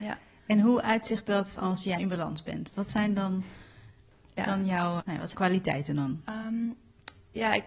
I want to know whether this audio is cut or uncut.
cut